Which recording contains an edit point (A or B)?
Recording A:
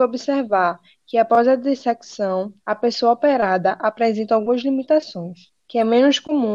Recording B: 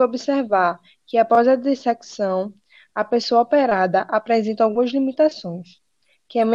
A